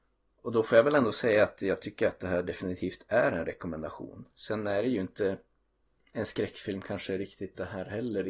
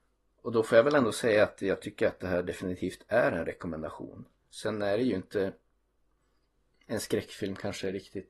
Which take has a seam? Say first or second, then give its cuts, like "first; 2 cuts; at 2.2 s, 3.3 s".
first; 2 cuts; at 4.3 s, 5.9 s